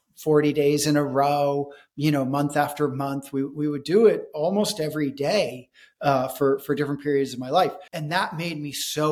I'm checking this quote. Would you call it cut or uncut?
cut